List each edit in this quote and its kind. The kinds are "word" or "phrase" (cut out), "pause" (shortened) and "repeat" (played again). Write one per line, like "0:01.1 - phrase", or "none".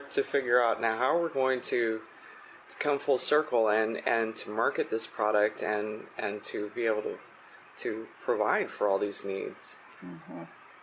none